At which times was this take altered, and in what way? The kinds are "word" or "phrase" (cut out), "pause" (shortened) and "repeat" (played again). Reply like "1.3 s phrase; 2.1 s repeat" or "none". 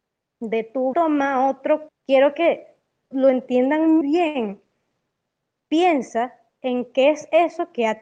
0.9 s word; 1.9 s word; 3.1 s word; 4.0 s word